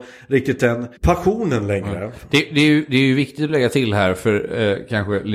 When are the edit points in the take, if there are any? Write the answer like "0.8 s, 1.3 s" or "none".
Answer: 1.0 s